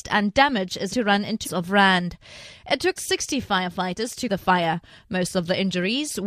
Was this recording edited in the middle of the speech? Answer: yes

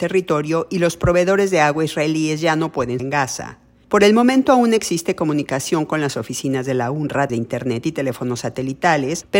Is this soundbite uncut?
no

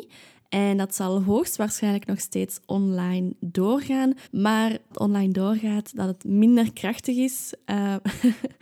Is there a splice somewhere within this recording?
yes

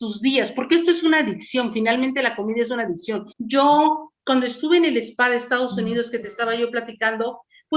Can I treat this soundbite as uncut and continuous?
no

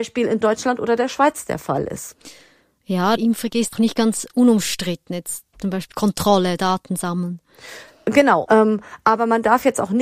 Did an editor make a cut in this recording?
yes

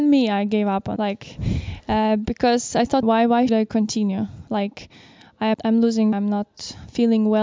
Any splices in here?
yes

